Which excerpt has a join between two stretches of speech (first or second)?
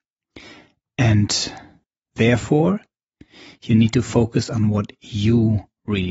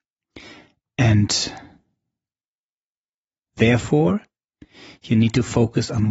first